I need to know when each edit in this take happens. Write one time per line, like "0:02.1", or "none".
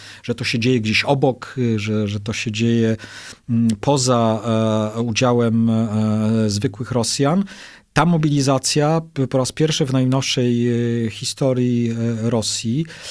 none